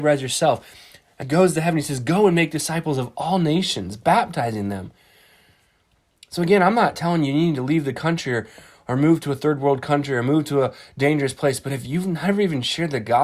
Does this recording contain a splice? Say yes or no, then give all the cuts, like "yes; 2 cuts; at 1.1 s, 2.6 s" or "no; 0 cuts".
yes; 1 cut; at 1.2 s